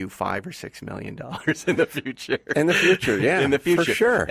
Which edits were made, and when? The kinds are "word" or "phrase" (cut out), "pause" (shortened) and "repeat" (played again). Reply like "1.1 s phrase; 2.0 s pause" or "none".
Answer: none